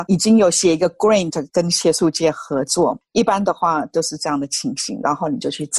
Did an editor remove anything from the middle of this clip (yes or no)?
no